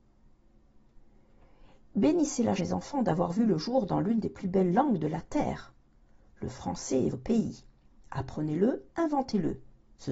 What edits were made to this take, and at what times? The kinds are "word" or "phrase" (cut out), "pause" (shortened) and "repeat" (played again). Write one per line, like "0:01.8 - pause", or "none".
0:02.6 - word
0:07.1 - word
0:08.9 - pause